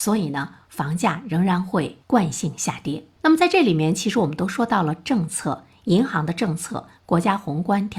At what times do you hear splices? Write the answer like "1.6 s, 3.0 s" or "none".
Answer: 2.0 s